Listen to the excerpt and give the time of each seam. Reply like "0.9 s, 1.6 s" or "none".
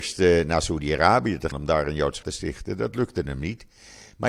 1.5 s, 2.2 s